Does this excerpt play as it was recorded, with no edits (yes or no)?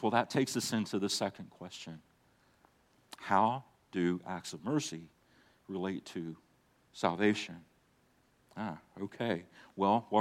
yes